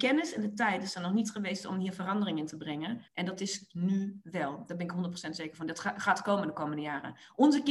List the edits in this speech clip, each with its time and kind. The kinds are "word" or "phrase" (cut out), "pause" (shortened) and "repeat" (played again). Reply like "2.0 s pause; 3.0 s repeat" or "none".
3.1 s pause